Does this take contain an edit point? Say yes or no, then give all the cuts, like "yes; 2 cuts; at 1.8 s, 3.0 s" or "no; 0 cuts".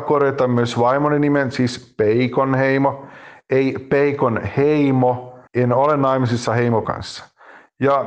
yes; 2 cuts; at 5.5 s, 6.8 s